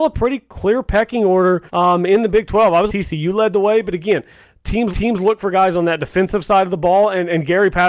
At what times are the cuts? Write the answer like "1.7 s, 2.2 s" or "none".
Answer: 1.7 s, 2.9 s, 4.9 s